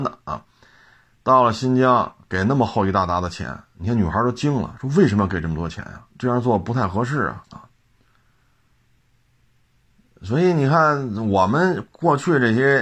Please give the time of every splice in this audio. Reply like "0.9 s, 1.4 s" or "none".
6.1 s, 7.4 s